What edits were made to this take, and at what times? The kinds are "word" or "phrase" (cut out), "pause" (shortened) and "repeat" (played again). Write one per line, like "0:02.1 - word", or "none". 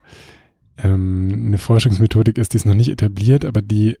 none